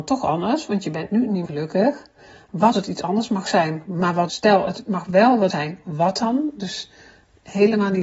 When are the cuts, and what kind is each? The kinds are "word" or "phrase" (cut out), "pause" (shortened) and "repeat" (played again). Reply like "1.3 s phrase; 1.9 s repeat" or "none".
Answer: 1.5 s word; 2.7 s word; 4.3 s word; 5.5 s word

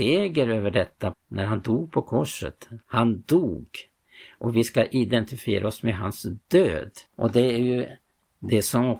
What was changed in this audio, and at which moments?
1.1 s word; 2.8 s pause; 7.1 s pause

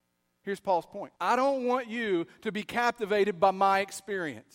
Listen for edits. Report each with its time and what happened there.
1.2 s pause

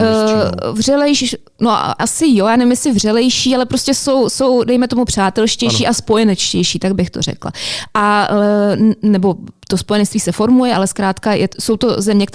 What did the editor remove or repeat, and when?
2.0 s word

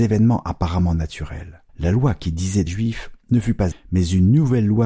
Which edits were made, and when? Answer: 1.7 s pause; 2.7 s phrase; 3.7 s word

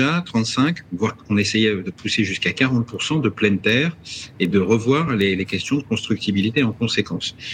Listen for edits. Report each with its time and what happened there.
none

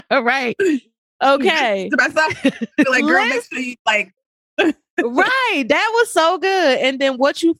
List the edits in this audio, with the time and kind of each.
none

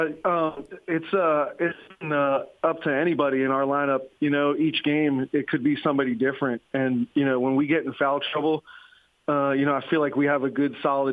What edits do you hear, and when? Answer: none

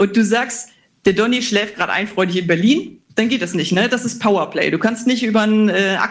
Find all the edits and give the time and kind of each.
3.1 s pause

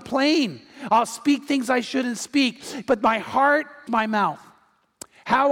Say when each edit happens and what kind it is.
3.9 s phrase

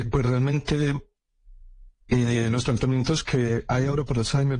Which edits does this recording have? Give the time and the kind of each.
none

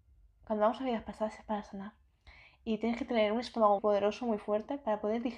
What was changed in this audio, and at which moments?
3.8 s word

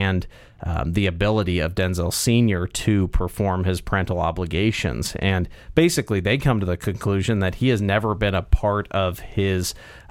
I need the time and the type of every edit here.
none

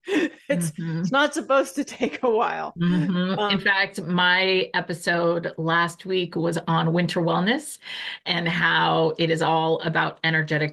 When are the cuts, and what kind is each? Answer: none

